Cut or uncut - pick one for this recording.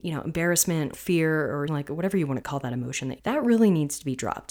cut